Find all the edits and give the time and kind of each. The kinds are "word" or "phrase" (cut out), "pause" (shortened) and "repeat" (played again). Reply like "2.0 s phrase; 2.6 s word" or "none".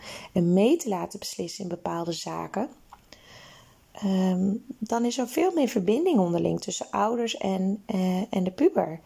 none

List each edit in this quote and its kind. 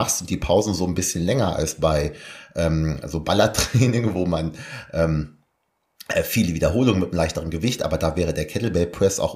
none

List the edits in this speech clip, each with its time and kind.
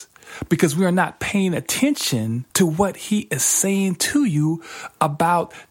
2.5 s pause

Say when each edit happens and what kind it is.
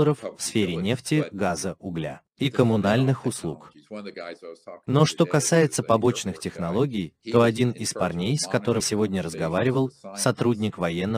8.8 s word

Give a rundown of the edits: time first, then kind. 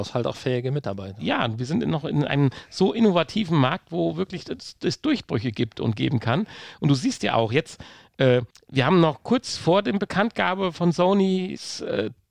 none

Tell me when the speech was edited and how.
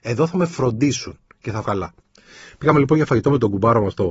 1.6 s word

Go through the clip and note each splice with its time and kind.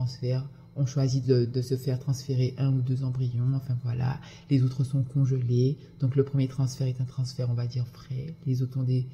none

